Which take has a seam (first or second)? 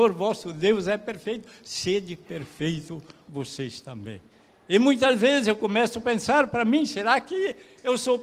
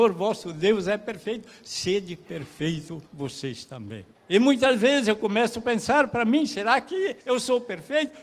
second